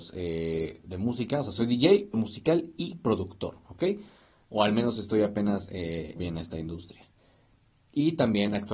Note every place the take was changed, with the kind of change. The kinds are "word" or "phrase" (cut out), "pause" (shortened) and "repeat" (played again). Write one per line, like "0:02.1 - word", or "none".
0:02.1 - word
0:06.2 - word